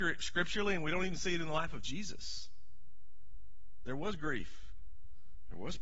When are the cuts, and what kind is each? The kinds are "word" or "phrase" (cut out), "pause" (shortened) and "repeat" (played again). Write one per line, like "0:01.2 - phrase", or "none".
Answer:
none